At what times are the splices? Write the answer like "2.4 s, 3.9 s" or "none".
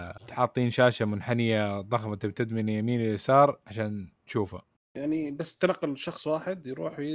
none

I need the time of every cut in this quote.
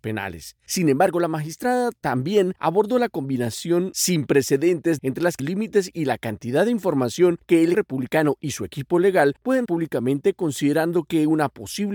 5.0 s, 5.4 s, 7.7 s, 9.7 s

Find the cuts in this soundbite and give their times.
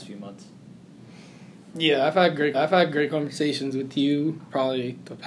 2.5 s

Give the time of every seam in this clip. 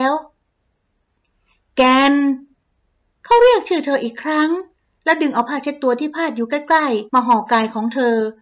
7.1 s

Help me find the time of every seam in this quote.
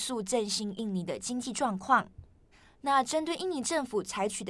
2.5 s

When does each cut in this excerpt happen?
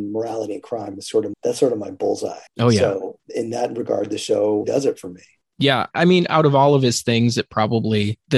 1.3 s, 2.5 s, 4.6 s, 5.9 s

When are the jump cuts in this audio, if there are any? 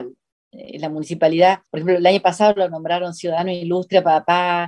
1.7 s

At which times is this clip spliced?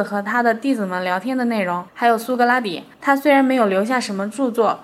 1.9 s, 2.9 s

